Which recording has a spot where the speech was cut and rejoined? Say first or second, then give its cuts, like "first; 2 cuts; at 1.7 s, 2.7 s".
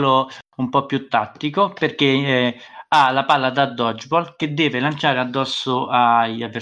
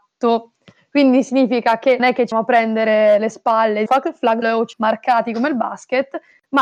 second; 5 cuts; at 2.0 s, 2.3 s, 3.9 s, 4.4 s, 4.7 s